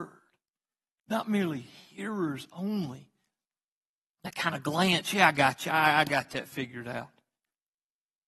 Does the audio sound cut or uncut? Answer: uncut